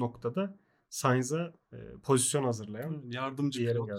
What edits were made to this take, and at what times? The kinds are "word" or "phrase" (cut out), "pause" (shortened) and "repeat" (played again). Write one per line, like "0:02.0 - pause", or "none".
none

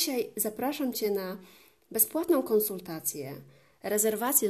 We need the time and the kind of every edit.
none

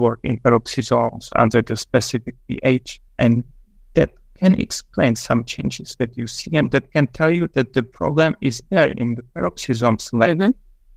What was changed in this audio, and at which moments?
0:03.1 - pause

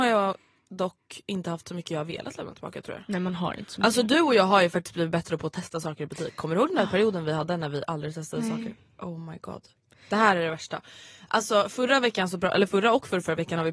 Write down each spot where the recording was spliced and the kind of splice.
none

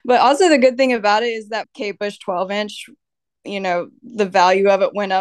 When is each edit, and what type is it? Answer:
0:01.6 - word

